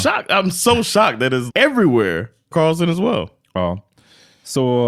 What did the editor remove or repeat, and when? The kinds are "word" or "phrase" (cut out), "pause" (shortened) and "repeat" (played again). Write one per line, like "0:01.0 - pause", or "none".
0:01.5 - word
0:02.5 - phrase